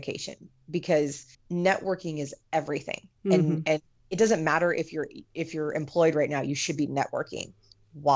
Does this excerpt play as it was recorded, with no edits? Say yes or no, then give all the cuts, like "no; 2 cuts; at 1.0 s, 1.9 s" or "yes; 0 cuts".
no; 2 cuts; at 1.3 s, 5.2 s